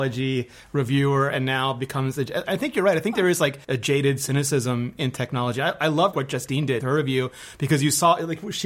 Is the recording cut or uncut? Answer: cut